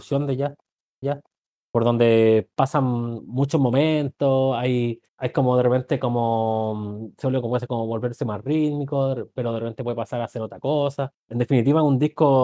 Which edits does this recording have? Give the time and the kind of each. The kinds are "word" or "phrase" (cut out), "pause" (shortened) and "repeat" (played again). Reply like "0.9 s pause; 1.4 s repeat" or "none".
1.0 s repeat; 5.1 s pause; 11.1 s pause